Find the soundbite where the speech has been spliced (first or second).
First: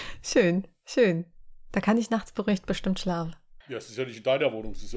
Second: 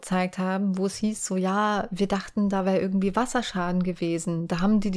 first